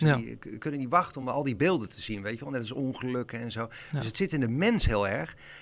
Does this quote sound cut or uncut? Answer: uncut